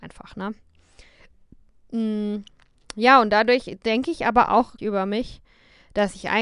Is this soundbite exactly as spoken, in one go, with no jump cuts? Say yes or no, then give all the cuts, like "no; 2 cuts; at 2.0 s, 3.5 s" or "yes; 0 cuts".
no; 1 cut; at 4.8 s